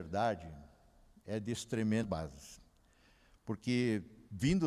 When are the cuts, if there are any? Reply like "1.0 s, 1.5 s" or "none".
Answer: 2.0 s